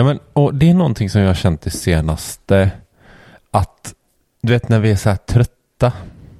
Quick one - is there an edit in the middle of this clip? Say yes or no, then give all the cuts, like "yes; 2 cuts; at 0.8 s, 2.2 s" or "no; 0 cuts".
no; 0 cuts